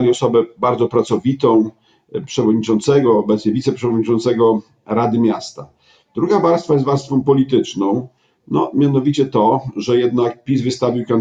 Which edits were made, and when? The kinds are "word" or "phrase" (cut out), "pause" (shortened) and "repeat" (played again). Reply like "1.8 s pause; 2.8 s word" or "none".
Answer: none